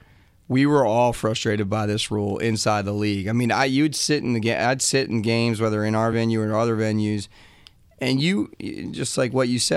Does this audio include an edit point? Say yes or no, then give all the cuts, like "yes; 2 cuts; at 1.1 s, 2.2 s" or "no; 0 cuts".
no; 0 cuts